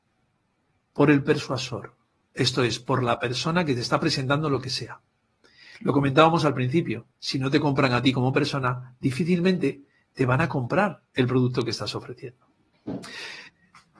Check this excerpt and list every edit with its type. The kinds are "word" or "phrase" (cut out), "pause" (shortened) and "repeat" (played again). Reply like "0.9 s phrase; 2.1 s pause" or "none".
none

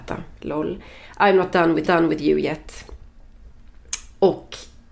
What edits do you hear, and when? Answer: 1.8 s repeat

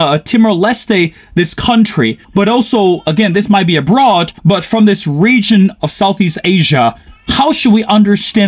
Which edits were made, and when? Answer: 2.2 s pause; 4.4 s pause

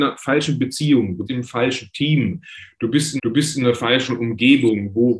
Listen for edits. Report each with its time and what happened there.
1.3 s word; 3.2 s repeat

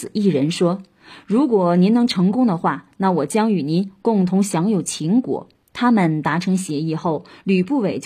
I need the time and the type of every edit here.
5.6 s pause

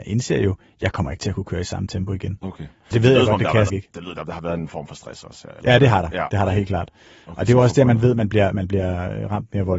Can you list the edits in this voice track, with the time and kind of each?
2.9 s word; 3.7 s word; 4.2 s word

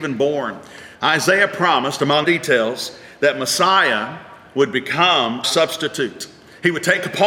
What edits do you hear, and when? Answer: 0.9 s pause; 2.2 s word; 5.4 s word

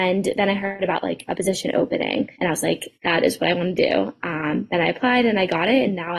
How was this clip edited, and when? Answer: 2.3 s pause; 3.0 s pause

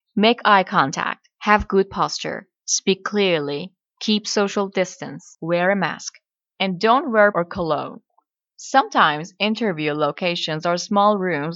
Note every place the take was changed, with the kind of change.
7.3 s word

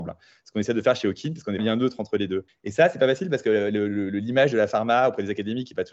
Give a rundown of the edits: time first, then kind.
1.6 s word; 2.5 s pause

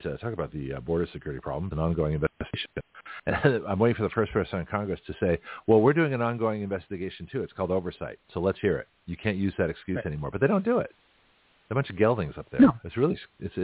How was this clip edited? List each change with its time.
1.7 s phrase; 3.3 s word; 8.2 s pause; 9.0 s pause

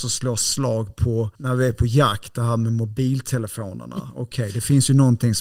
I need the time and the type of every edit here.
1.4 s pause

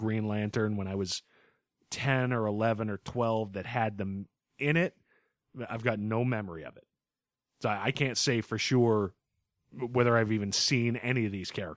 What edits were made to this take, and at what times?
none

